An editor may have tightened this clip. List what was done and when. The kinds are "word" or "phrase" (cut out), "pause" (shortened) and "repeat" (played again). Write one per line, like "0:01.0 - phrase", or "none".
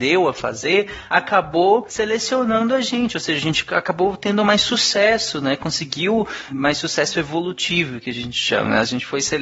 none